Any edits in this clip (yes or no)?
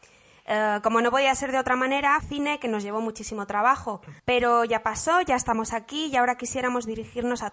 yes